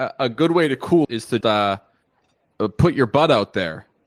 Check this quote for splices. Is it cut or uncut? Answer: cut